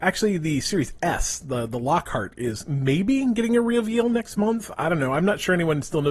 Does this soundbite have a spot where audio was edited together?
no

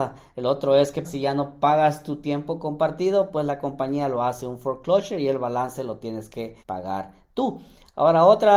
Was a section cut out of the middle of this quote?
yes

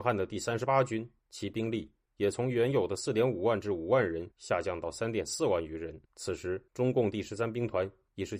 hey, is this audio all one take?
no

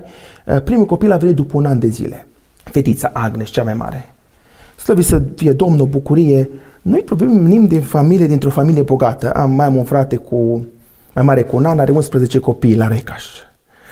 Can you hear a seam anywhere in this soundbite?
no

